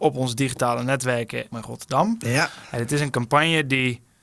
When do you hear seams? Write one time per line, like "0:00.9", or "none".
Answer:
0:01.5